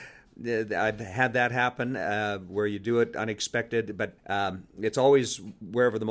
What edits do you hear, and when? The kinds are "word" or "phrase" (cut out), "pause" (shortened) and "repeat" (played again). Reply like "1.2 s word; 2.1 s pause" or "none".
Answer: 4.2 s pause